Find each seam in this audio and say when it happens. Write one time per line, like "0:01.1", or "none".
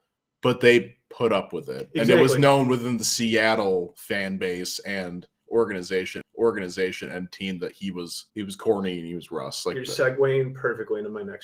0:06.2
0:08.3